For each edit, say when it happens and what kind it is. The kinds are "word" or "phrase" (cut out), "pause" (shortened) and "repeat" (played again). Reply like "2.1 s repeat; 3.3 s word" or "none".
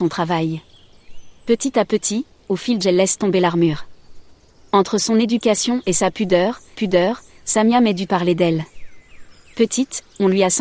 2.8 s word; 6.7 s repeat; 8.1 s phrase